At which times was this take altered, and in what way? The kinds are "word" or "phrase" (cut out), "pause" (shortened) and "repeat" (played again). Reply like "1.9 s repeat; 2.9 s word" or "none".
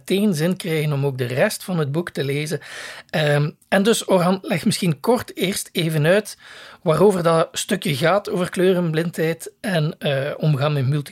none